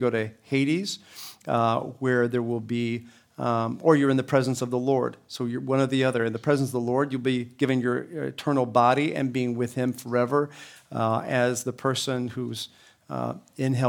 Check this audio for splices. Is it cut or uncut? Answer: uncut